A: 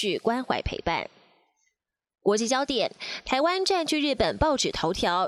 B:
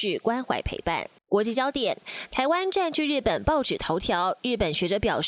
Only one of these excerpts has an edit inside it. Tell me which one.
B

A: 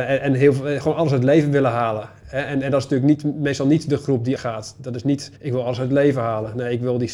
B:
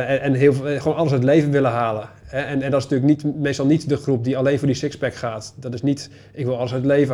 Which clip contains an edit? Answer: A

